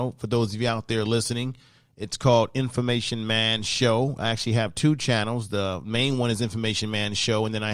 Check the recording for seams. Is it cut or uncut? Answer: uncut